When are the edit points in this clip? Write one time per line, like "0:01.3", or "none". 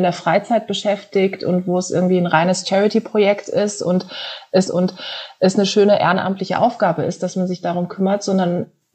0:04.6